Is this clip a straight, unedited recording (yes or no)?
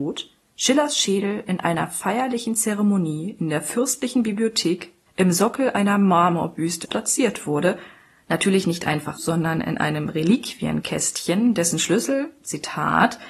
no